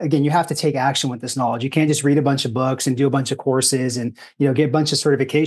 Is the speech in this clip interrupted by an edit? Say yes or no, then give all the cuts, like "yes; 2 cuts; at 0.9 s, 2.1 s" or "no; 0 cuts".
no; 0 cuts